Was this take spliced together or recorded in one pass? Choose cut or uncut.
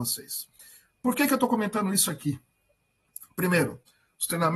uncut